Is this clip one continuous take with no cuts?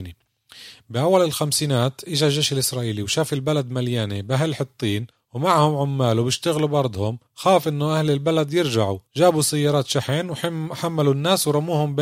no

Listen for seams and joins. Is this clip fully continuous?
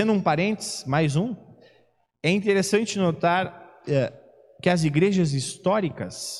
yes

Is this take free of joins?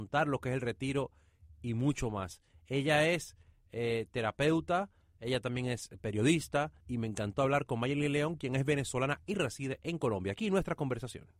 no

